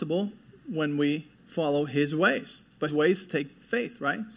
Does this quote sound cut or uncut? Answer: cut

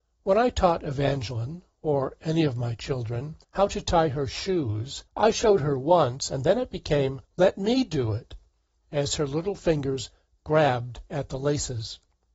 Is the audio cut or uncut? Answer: cut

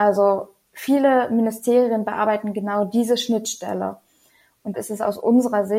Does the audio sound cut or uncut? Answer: cut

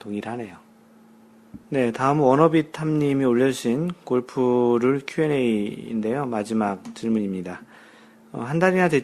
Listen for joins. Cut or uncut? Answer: cut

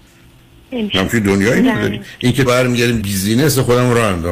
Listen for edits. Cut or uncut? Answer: cut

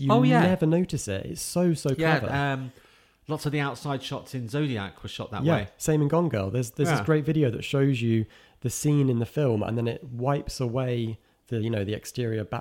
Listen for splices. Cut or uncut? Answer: cut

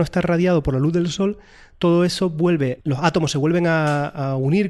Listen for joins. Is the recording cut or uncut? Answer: uncut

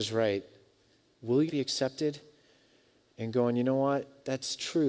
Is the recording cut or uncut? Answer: cut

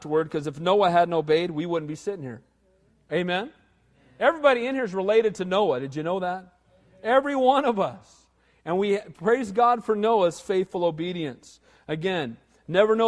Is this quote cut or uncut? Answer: uncut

